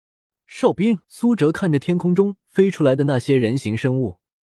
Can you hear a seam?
yes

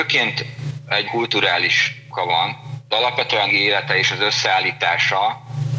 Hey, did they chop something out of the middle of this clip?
yes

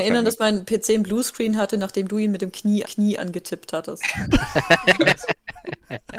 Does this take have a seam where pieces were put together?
yes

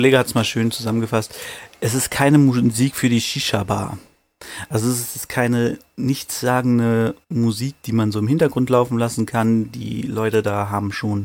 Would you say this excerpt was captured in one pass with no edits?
no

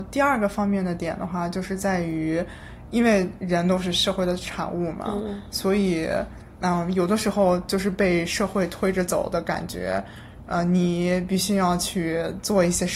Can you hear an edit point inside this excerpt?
no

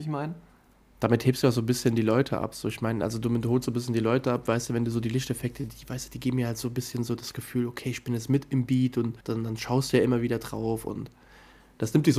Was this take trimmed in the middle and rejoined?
yes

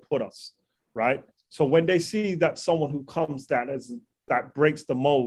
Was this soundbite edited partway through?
no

